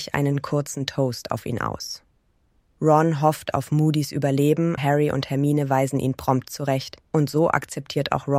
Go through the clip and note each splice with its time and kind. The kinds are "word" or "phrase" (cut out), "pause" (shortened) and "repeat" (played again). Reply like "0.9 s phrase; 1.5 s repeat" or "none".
4.8 s word; 7.0 s pause